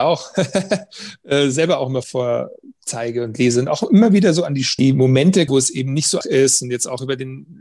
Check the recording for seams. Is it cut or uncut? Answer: cut